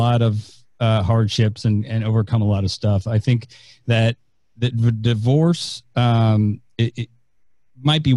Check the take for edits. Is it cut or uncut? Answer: uncut